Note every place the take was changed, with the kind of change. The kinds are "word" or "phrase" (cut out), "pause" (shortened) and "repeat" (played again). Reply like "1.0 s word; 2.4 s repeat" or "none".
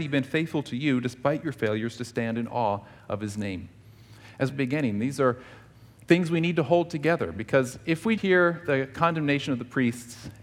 4.5 s phrase; 8.2 s word